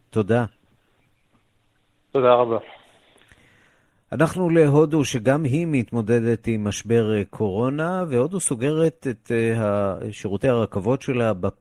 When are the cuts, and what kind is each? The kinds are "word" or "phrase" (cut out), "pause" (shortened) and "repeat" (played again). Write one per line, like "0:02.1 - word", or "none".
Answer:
none